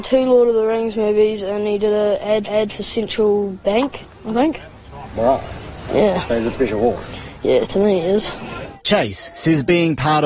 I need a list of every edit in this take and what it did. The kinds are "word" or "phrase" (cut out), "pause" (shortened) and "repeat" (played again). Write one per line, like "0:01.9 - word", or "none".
0:02.4 - repeat
0:06.5 - word
0:08.8 - pause